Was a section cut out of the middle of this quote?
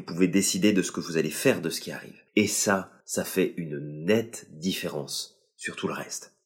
yes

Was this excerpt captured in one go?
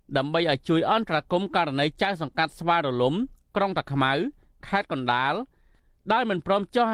yes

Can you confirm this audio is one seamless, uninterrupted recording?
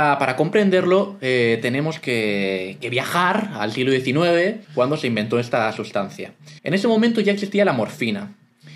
no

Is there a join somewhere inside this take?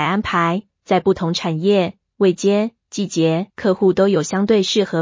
yes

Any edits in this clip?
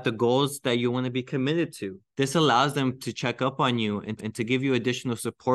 yes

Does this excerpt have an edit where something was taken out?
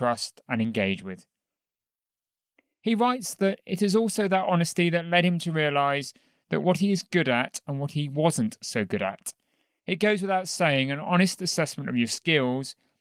no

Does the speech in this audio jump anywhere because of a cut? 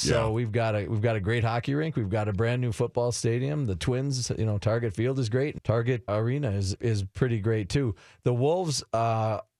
yes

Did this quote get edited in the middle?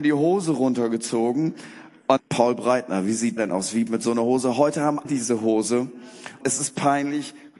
yes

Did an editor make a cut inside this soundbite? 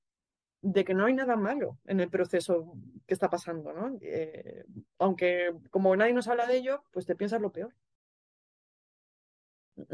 no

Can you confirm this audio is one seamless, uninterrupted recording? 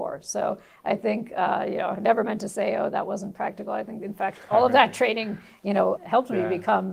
no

